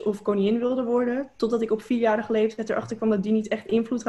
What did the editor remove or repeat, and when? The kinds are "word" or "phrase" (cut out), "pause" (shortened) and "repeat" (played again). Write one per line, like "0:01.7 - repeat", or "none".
none